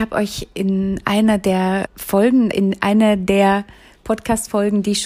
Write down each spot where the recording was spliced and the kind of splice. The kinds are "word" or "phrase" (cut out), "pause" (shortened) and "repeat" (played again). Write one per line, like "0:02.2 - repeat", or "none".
0:01.9 - word
0:02.5 - word